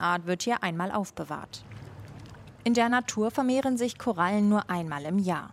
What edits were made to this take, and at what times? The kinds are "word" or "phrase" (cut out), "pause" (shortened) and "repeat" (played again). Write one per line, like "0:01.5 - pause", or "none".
none